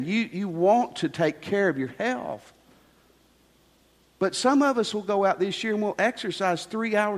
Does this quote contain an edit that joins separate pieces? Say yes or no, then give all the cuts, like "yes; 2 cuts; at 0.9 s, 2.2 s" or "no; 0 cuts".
no; 0 cuts